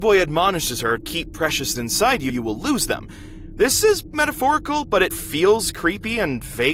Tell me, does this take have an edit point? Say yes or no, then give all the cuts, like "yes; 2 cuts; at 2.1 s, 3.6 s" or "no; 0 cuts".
yes; 5 cuts; at 1.0 s, 1.8 s, 2.3 s, 4.1 s, 5.1 s